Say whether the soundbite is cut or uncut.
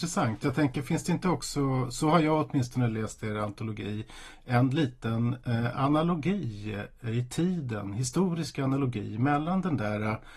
uncut